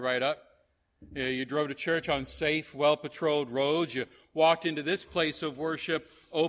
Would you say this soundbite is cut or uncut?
uncut